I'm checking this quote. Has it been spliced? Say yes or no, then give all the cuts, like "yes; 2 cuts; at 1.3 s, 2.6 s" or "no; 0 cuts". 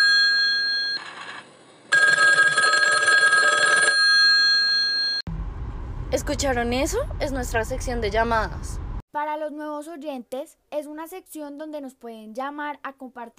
yes; 2 cuts; at 9.1 s, 10.7 s